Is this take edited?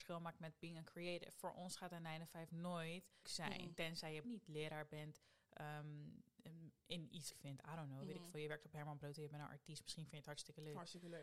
yes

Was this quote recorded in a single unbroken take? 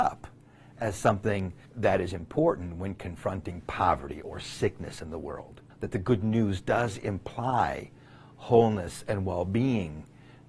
no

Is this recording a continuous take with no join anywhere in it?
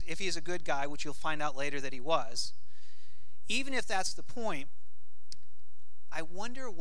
yes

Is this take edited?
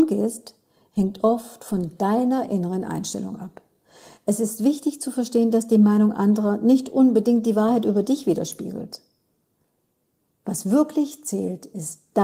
no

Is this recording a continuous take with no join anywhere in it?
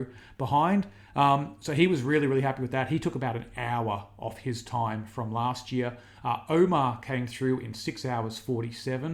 yes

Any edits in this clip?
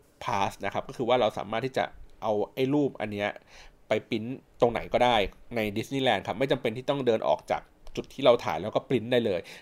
yes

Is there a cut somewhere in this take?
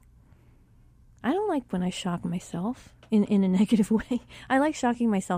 no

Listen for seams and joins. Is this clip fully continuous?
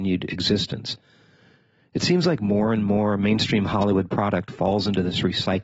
yes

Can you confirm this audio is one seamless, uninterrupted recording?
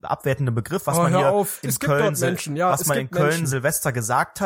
no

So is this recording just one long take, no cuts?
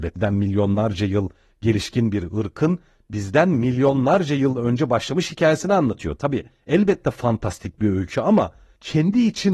yes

